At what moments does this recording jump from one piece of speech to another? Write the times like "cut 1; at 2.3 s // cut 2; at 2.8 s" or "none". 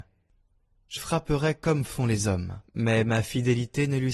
cut 1; at 1.0 s // cut 2; at 2.7 s